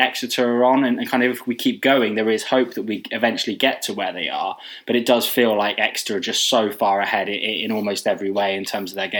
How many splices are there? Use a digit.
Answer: 0